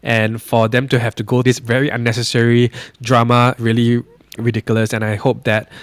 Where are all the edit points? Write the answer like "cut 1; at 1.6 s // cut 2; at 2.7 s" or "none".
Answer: cut 1; at 1.4 s // cut 2; at 3.6 s // cut 3; at 4.4 s